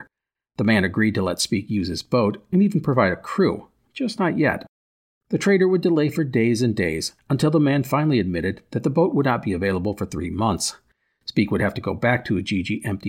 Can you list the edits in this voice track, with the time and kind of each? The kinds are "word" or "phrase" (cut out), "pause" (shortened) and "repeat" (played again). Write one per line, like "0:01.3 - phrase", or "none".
none